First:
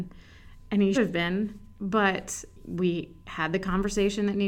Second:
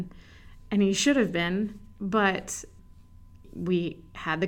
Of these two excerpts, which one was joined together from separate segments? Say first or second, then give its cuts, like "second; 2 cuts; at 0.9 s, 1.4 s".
first; 2 cuts; at 0.9 s, 2.5 s